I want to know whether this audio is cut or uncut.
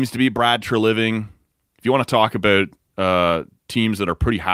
uncut